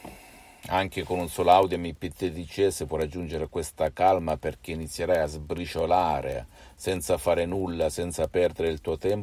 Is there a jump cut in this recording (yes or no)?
no